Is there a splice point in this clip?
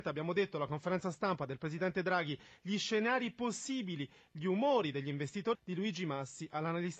yes; 1 cut; at 5.5 s

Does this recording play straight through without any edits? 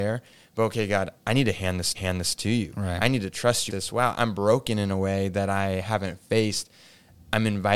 no; 4 cuts; at 1.2 s, 1.9 s, 3.7 s, 4.1 s

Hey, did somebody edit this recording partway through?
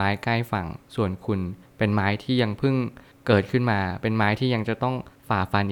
no; 0 cuts

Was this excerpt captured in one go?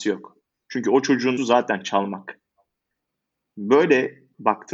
no; 1 cut; at 1.4 s

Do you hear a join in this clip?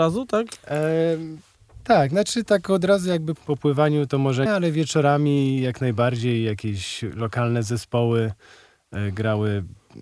yes; 3 cuts; at 3.4 s, 4.1 s, 4.5 s

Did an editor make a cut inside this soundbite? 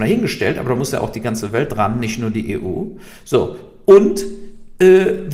no; 0 cuts

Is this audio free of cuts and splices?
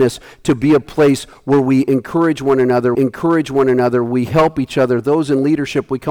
no; 1 cut; at 2.9 s

